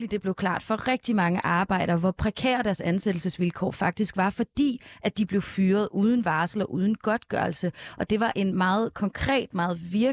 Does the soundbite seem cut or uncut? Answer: uncut